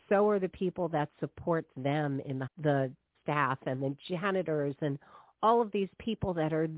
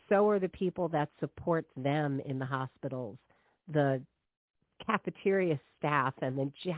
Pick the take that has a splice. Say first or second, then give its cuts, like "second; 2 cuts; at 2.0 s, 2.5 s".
first; 2 cuts; at 2.5 s, 3.1 s